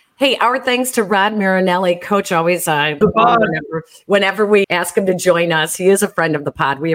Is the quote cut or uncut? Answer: cut